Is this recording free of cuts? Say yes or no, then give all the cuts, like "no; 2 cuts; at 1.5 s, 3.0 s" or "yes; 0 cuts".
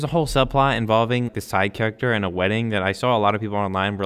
no; 1 cut; at 1.3 s